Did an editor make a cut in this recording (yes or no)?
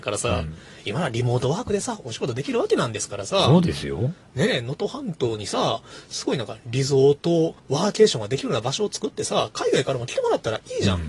yes